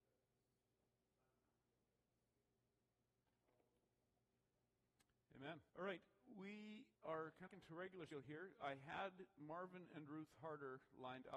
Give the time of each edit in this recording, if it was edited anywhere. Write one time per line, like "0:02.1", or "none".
0:05.7
0:06.9
0:07.5
0:08.1